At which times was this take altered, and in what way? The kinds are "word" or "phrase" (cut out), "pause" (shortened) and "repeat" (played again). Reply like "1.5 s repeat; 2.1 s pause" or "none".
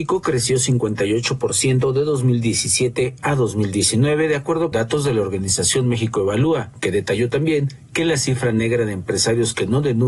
4.7 s word